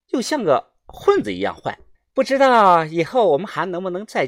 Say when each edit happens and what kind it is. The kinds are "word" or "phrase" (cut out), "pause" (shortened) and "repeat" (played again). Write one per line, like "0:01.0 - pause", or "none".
0:01.9 - phrase